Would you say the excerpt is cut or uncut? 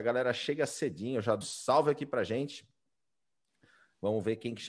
cut